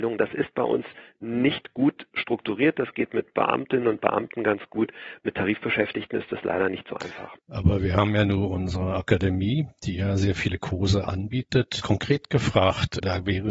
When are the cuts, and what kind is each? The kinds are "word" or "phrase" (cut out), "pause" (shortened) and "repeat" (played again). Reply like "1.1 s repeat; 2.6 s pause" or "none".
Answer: 7.4 s pause; 11.8 s word